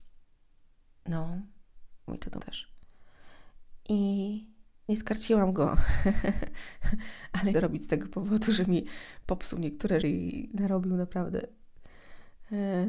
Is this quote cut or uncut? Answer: cut